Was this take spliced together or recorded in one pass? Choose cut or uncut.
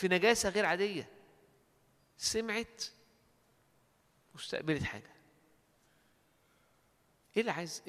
uncut